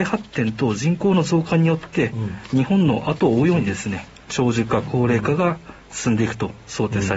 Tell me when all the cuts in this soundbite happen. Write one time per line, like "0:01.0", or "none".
0:04.2